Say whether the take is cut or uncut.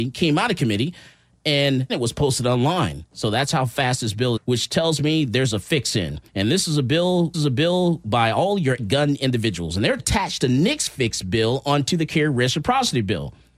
cut